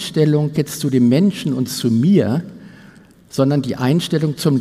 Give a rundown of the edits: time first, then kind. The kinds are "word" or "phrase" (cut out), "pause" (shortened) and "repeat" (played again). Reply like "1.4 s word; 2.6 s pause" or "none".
none